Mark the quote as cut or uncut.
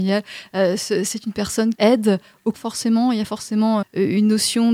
cut